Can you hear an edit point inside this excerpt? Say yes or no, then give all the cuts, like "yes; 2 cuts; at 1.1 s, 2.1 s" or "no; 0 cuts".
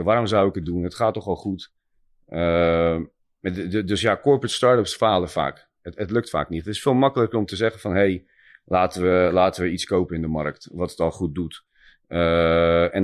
no; 0 cuts